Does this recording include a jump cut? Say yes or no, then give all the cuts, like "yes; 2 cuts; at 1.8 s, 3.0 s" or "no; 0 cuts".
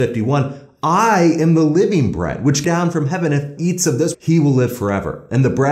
yes; 3 cuts; at 2.6 s, 3.6 s, 4.1 s